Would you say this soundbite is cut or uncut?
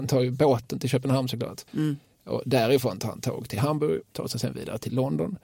cut